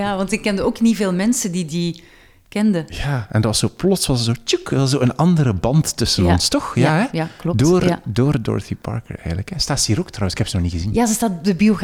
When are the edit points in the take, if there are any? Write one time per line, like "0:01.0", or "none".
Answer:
none